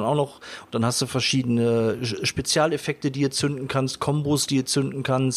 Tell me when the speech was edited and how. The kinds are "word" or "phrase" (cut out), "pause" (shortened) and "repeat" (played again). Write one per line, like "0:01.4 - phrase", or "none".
none